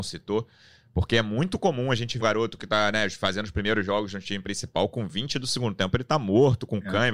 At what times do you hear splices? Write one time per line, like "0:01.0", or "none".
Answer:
0:02.2